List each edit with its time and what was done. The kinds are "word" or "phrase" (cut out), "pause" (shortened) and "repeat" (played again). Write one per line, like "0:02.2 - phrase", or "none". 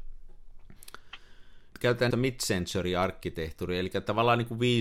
0:01.7 - word
0:02.1 - word

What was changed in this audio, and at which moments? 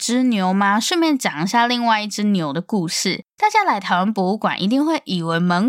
0:03.3 - pause

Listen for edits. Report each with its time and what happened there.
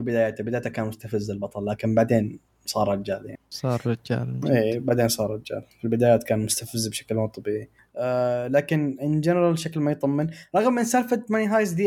none

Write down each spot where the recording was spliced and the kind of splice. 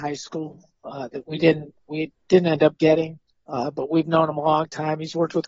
0:03.3 - pause

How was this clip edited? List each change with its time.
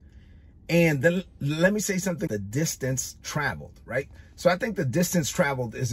0:02.3 - word

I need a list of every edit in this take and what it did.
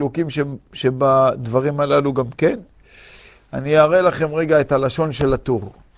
none

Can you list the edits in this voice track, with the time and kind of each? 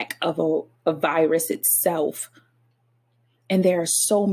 none

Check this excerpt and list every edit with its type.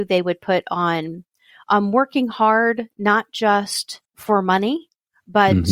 0:04.0 - pause

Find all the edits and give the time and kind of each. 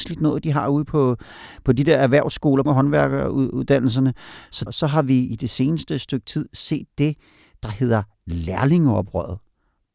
0:02.7 - word
0:04.7 - word

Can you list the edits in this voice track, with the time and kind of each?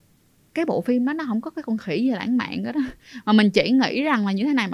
none

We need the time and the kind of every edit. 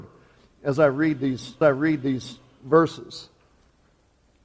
0:01.6 - repeat

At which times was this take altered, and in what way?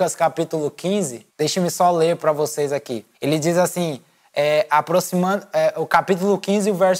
0:01.3 - pause
0:03.1 - pause

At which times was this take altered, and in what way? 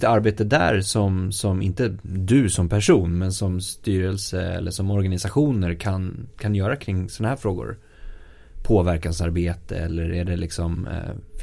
none

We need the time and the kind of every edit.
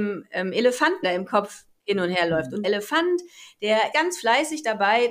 0:01.0 - word
0:02.6 - word
0:03.9 - word

